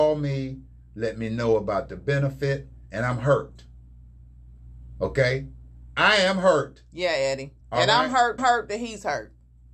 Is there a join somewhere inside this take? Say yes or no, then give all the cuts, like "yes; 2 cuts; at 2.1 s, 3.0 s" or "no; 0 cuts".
yes; 2 cuts; at 7.6 s, 8.4 s